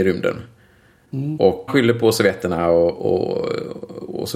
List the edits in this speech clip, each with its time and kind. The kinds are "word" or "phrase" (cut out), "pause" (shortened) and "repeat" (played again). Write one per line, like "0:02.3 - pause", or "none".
0:01.7 - phrase